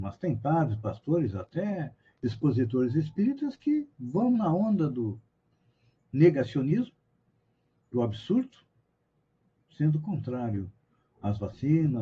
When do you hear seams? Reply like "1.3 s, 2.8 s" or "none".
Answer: none